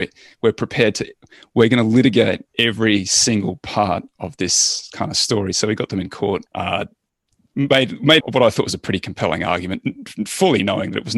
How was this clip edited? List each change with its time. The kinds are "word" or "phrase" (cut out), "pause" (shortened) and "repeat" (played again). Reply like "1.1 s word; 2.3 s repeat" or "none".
2.5 s pause; 6.5 s pause; 8.2 s word